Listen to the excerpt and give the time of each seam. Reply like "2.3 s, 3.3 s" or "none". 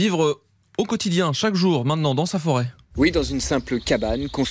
none